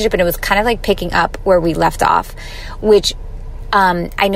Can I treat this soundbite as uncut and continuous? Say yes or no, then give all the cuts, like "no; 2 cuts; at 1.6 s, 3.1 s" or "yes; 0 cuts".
yes; 0 cuts